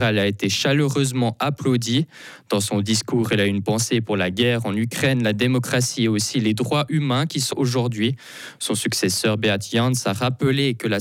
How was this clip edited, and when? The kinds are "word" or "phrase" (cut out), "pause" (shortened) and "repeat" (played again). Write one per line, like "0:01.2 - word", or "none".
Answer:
0:07.5 - word